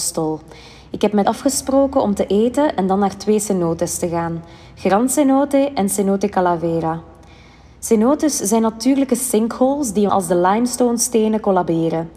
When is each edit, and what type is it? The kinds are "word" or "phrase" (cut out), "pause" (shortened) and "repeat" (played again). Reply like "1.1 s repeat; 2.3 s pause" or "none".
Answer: 1.2 s word; 10.1 s word